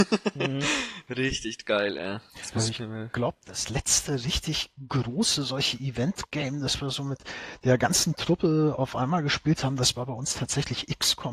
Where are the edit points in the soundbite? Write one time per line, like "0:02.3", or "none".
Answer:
0:02.3